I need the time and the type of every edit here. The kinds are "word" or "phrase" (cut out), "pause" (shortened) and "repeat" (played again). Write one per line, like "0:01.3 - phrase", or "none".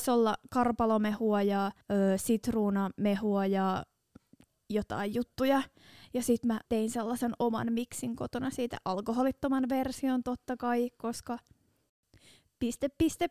0:01.8 - pause
0:06.7 - pause

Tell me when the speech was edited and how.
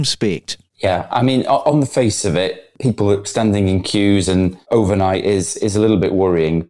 none

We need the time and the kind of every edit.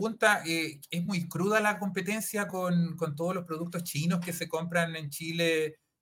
none

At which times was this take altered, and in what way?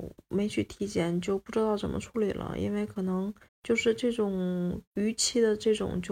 0:03.4 - pause
0:04.8 - pause

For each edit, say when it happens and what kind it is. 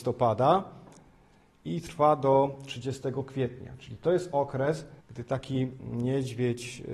0:05.0 - pause

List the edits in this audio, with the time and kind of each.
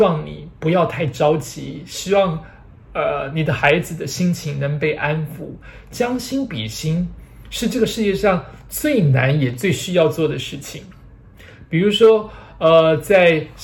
none

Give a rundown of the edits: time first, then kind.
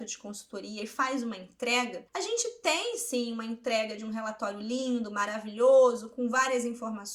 0:02.1 - pause

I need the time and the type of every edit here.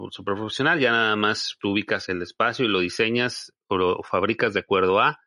0:01.6 - word
0:02.1 - word

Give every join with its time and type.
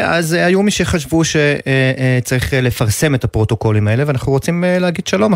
none

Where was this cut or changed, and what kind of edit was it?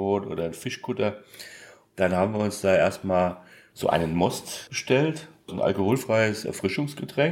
none

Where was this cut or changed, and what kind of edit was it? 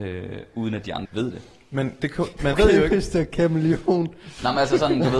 0:01.0 - word
0:02.0 - word
0:02.5 - word

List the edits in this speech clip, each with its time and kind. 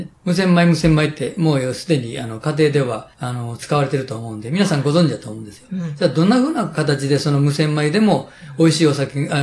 0:03.1 - pause

